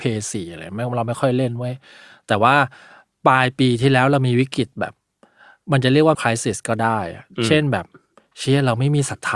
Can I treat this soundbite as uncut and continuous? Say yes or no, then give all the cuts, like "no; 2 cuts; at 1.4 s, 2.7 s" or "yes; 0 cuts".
no; 1 cut; at 6.1 s